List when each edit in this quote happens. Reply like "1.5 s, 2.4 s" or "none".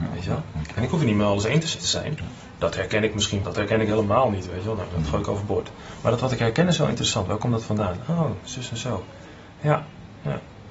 1.8 s, 3.4 s